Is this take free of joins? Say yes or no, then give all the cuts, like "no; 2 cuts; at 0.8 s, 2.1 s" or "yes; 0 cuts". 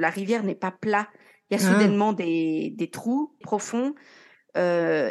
no; 1 cut; at 3.4 s